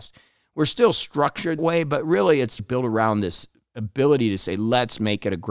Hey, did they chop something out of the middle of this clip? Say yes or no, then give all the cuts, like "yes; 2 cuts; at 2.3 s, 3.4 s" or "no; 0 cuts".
yes; 2 cuts; at 1.6 s, 2.6 s